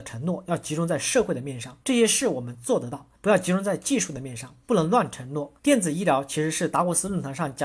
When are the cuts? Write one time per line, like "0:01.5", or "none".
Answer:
0:01.8
0:03.2
0:05.6